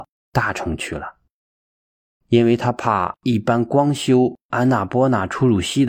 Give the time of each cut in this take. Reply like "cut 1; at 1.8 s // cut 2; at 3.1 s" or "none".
none